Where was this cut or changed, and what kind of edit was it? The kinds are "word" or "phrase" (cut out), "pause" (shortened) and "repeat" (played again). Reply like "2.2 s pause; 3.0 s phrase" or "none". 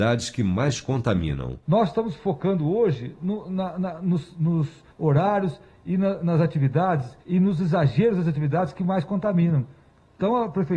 1.6 s pause; 4.9 s pause; 7.2 s pause